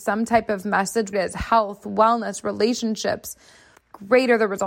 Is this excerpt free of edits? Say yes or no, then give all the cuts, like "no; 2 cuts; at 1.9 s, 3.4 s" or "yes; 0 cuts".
no; 2 cuts; at 1.1 s, 3.8 s